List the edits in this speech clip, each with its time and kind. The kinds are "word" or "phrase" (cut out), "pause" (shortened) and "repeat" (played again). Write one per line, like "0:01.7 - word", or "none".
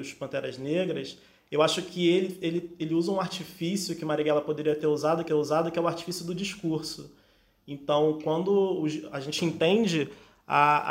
0:05.3 - repeat